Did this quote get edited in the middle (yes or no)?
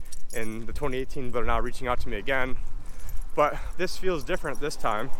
yes